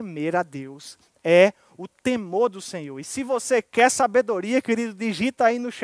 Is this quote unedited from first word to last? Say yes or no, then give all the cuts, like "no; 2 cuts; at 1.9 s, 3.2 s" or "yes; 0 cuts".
yes; 0 cuts